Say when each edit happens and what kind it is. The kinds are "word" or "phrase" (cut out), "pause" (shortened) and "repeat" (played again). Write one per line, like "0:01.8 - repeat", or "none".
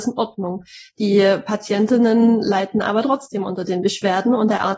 none